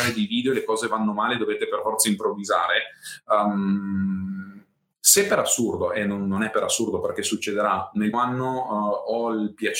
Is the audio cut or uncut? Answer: cut